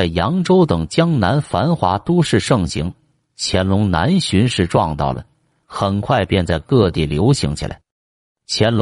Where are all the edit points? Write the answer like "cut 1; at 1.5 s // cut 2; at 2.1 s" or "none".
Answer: none